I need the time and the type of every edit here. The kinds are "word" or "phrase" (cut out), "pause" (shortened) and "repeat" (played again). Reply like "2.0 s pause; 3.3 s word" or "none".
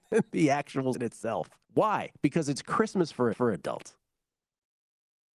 0.9 s word; 1.6 s pause; 3.3 s repeat